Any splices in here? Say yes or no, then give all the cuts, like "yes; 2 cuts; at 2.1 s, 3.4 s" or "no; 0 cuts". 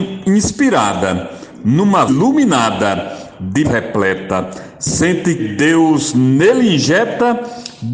yes; 3 cuts; at 2.1 s, 3.6 s, 5.4 s